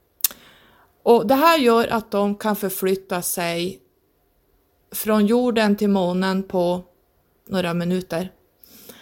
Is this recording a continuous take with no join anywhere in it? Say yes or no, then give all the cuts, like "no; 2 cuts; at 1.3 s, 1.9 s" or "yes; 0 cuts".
yes; 0 cuts